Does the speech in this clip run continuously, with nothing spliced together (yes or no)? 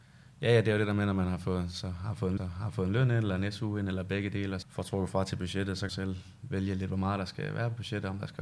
no